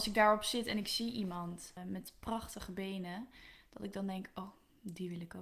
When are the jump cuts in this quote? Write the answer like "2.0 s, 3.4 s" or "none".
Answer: none